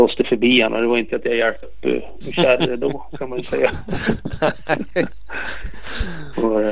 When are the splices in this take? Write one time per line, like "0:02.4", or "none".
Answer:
0:01.1
0:01.6

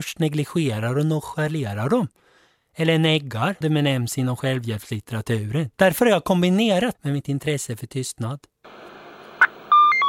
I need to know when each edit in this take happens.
0:03.6
0:05.7
0:06.9

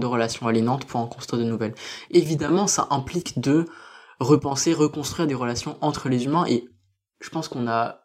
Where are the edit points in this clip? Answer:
0:02.1

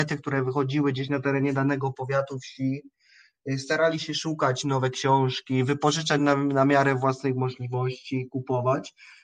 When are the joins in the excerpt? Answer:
none

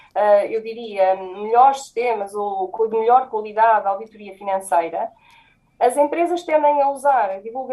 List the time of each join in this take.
none

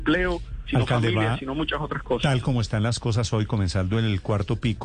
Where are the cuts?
none

